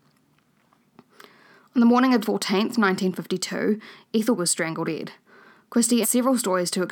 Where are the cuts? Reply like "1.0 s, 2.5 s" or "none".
2.2 s, 4.4 s, 4.8 s, 6.0 s